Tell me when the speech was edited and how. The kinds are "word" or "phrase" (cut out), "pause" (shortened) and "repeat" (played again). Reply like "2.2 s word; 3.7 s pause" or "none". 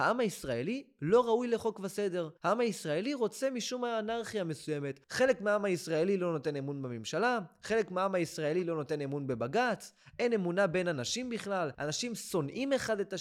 2.4 s pause